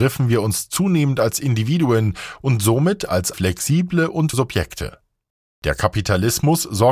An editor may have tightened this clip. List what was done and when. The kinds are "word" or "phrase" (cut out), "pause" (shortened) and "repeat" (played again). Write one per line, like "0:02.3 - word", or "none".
0:03.3 - word
0:04.3 - word

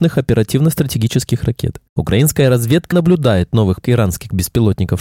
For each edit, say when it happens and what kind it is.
0:02.9 - word
0:03.8 - word

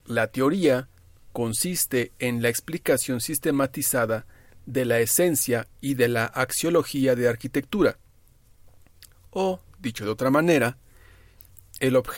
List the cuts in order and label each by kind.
none

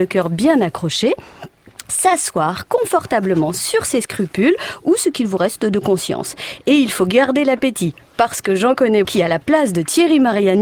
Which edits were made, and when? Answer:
0:09.0 - word

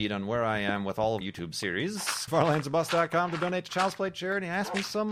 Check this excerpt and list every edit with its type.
0:01.2 - word
0:02.3 - phrase

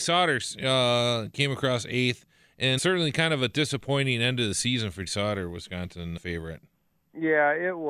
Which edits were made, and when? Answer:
0:02.8 - word
0:05.1 - word
0:06.2 - word

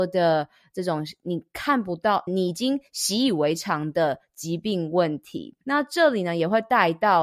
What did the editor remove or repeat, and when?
0:02.3 - phrase
0:05.6 - pause

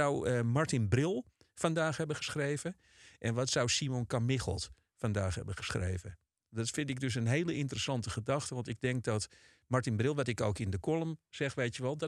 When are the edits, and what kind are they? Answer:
none

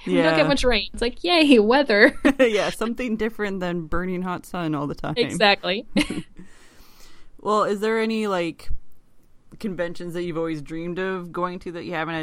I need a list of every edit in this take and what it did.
0:00.9 - word

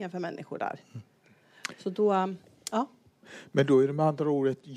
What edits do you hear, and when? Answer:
none

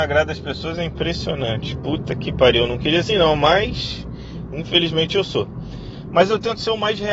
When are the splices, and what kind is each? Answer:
0:03.1 - word

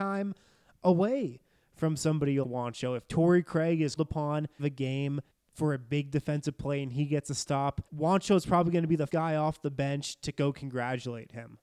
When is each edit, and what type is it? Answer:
0:02.4 - word
0:04.0 - word
0:04.6 - phrase
0:05.3 - pause
0:07.9 - pause
0:09.1 - word

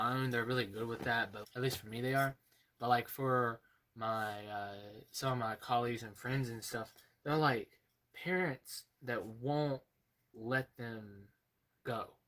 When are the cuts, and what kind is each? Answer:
0:01.4 - word
0:07.9 - pause

